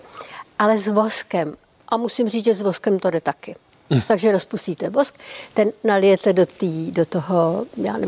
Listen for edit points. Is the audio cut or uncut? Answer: uncut